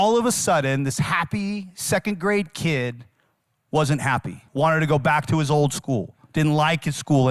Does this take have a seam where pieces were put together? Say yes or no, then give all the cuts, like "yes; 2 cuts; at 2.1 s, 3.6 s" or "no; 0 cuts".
yes; 1 cut; at 4.5 s